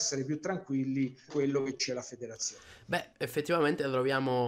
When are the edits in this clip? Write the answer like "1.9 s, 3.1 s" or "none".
1.3 s, 1.9 s, 3.1 s